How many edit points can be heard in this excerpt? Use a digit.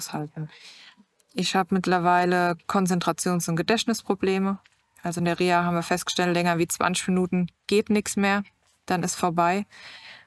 0